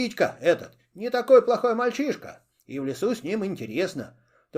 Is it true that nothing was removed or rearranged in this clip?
yes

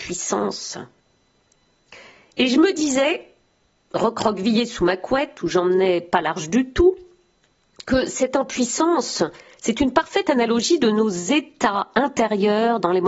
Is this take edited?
no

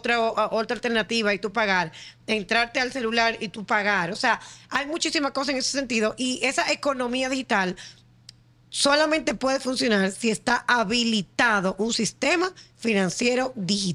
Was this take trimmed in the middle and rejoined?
no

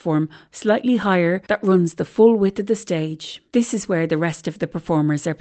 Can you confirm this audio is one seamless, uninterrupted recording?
no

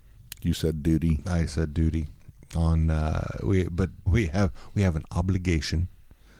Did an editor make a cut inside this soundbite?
yes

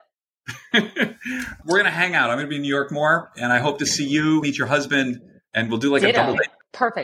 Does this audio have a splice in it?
yes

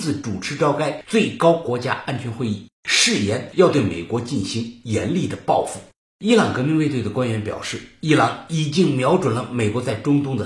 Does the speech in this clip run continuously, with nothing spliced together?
yes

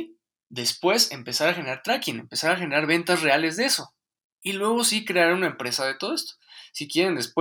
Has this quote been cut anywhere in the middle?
no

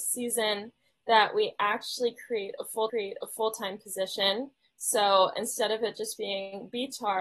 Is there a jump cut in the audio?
yes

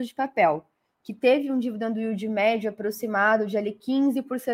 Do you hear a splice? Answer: no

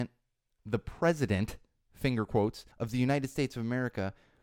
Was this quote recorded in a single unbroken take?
no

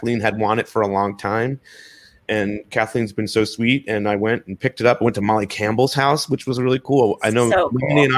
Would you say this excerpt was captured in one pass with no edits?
yes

